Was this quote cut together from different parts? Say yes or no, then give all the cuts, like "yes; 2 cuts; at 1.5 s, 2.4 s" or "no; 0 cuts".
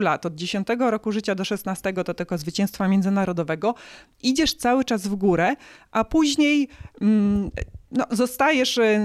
yes; 1 cut; at 7.8 s